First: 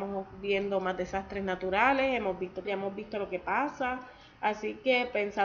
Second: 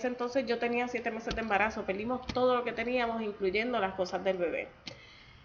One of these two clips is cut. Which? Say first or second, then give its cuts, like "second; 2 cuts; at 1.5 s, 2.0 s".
first; 1 cut; at 2.6 s